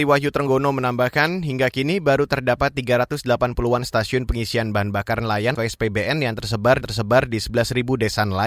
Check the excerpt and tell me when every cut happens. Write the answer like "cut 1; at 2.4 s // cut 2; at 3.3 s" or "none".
cut 1; at 5.5 s // cut 2; at 6.8 s